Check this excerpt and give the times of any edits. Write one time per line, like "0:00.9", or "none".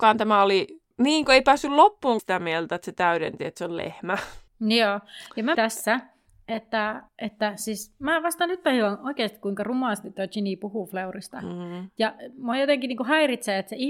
0:00.9
0:02.2
0:04.5
0:05.5
0:07.1